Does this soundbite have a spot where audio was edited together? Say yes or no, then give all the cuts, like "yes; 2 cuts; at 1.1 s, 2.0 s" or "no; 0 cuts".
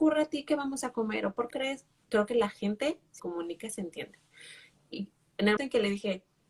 yes; 4 cuts; at 1.5 s, 2.0 s, 3.2 s, 5.6 s